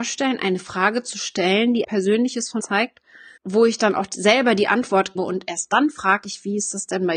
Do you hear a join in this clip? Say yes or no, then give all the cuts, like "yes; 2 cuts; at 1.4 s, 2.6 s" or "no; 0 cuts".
yes; 4 cuts; at 1.8 s, 2.6 s, 3.4 s, 5.2 s